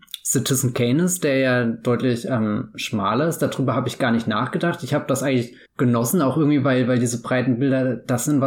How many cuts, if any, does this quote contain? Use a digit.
1